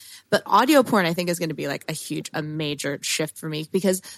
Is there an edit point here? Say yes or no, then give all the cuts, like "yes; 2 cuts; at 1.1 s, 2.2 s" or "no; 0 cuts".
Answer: no; 0 cuts